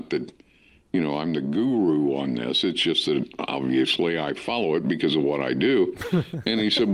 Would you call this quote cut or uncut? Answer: uncut